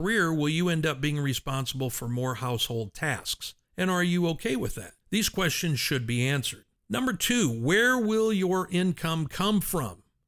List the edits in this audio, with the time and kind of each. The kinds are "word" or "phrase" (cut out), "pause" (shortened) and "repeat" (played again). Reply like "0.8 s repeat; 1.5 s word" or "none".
3.6 s pause; 5.0 s pause; 6.8 s pause